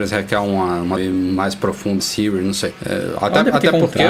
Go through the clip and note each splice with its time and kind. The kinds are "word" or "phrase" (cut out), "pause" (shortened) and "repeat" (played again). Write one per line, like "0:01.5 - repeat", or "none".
0:01.0 - word
0:02.0 - word